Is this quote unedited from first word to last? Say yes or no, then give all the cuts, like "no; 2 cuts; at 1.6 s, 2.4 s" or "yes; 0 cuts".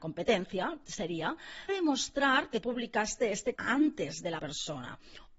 no; 4 cuts; at 1.7 s, 2.6 s, 3.5 s, 4.4 s